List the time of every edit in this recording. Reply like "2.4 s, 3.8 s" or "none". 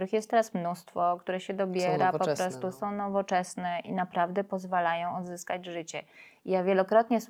none